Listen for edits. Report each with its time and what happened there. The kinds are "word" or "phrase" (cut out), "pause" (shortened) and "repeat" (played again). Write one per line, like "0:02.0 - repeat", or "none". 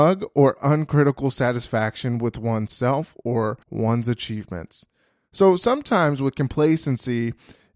0:03.6 - pause